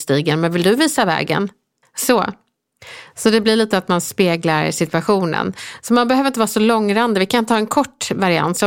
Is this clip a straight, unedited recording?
no; 1 cut; at 1.8 s

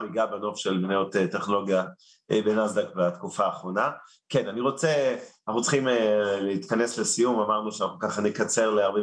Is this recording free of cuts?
yes; 0 cuts

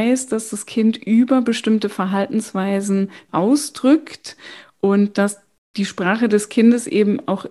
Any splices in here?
yes; 1 cut; at 3.3 s

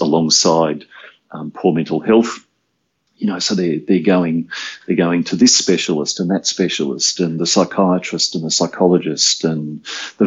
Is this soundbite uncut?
yes; 0 cuts

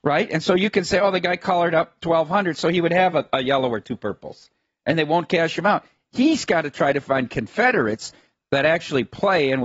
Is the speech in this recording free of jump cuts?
yes; 0 cuts

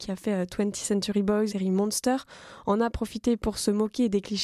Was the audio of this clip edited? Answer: yes; 1 cut; at 1.5 s

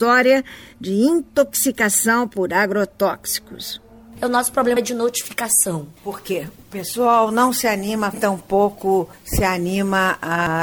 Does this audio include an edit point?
yes; 3 cuts; at 4.8 s, 6.0 s, 8.1 s

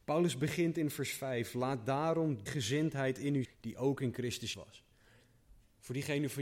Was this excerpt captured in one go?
no; 3 cuts; at 2.5 s, 3.4 s, 4.5 s

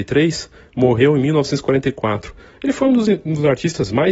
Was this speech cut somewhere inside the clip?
no; 0 cuts

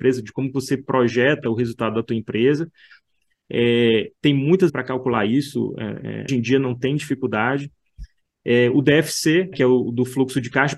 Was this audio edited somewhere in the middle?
yes; 3 cuts; at 4.7 s, 6.3 s, 9.5 s

